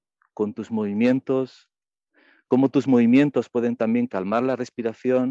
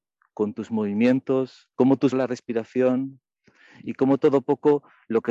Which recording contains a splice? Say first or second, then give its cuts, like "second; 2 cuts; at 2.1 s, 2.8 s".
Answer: second; 2 cuts; at 1.7 s, 2.1 s